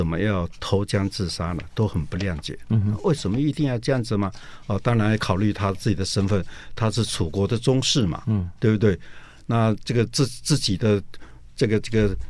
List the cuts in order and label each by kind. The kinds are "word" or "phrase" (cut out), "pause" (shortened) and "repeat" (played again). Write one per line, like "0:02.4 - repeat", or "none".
none